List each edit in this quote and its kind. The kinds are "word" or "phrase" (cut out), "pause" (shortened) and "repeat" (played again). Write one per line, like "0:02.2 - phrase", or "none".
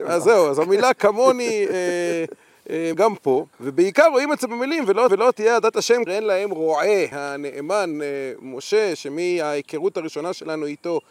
0:02.9 - word
0:03.5 - pause
0:05.1 - repeat
0:06.1 - phrase
0:07.1 - word

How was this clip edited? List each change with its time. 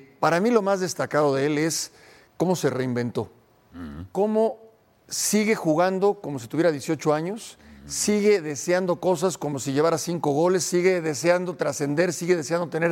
none

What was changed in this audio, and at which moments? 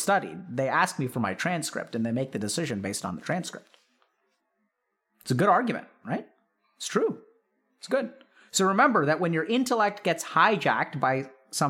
none

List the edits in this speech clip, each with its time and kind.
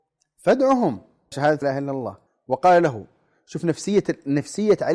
0:01.3 - word
0:01.6 - word
0:02.3 - word

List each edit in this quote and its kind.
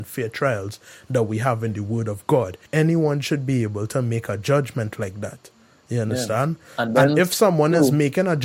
0:02.7 - pause

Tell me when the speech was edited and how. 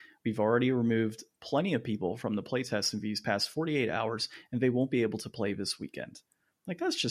none

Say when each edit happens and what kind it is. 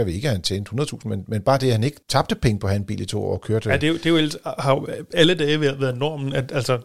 none

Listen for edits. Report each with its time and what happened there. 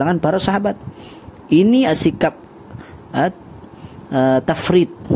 0:01.9 - word

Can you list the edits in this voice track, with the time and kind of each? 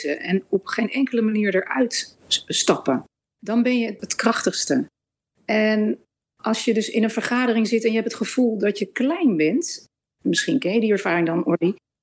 none

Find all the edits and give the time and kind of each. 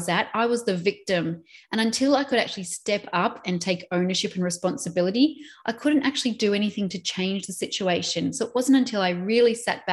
none

